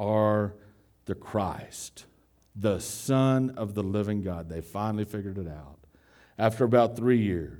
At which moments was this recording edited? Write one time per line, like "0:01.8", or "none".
none